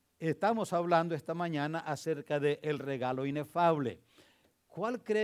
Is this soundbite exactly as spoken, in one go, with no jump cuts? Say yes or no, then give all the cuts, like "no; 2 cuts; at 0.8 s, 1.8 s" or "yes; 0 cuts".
yes; 0 cuts